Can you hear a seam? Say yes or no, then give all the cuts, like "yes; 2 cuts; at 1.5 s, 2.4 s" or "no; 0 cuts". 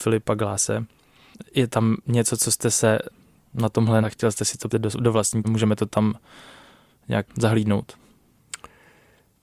yes; 4 cuts; at 4.0 s, 4.7 s, 5.4 s, 7.3 s